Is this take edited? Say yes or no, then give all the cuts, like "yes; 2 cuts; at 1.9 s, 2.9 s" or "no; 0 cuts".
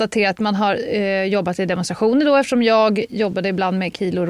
no; 0 cuts